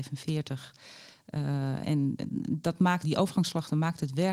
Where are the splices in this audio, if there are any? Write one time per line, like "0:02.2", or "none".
0:01.8
0:03.0